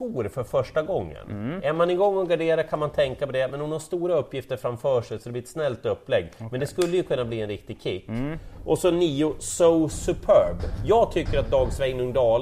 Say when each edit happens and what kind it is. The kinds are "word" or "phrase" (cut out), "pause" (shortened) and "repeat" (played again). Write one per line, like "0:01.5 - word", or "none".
none